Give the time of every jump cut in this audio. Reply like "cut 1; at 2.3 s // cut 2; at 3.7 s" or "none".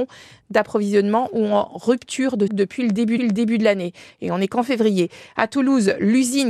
cut 1; at 2.5 s // cut 2; at 3.2 s